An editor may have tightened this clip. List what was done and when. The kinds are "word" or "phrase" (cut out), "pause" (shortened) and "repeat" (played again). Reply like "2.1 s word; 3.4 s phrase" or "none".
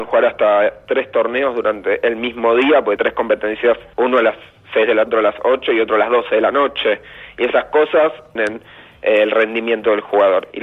3.0 s word; 3.9 s word; 5.1 s word; 8.4 s phrase